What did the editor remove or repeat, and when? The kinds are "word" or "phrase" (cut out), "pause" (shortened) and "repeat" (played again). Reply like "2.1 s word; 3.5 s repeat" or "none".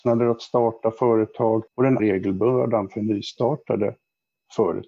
1.7 s pause; 2.0 s word